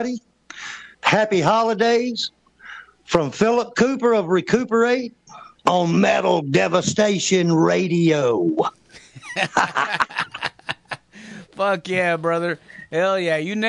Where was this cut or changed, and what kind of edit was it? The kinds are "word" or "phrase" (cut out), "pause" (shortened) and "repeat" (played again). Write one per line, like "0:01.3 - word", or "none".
0:00.9 - pause